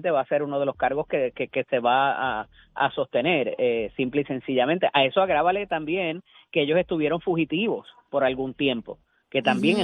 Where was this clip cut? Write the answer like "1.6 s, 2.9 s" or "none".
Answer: none